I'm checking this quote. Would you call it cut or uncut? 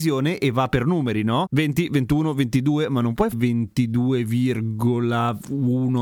cut